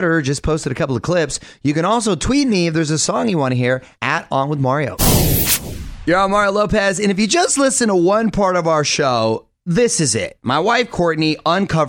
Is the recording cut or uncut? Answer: uncut